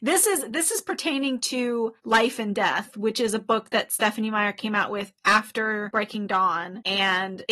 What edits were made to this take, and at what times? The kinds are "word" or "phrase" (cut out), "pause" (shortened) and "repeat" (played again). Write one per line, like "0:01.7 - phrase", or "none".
0:02.0 - pause